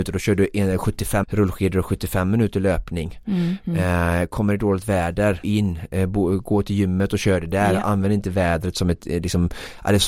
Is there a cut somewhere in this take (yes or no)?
yes